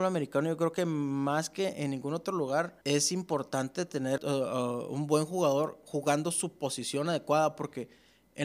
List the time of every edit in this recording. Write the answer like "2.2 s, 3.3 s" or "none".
2.8 s, 4.2 s